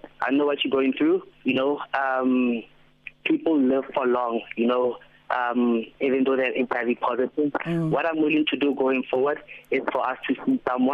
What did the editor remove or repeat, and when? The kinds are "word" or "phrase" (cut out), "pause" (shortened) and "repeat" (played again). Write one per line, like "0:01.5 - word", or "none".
0:01.3 - pause
0:05.9 - pause